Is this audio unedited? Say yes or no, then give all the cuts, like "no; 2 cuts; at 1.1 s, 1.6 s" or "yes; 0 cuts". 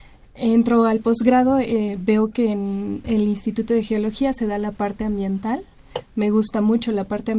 yes; 0 cuts